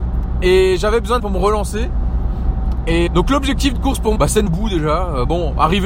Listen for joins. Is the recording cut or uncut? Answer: cut